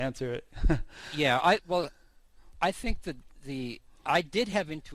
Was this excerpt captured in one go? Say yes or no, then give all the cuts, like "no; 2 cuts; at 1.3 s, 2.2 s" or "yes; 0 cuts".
yes; 0 cuts